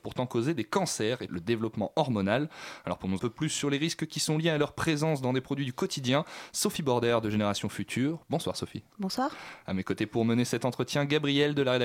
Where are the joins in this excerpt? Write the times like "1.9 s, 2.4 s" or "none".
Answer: 1.3 s, 3.2 s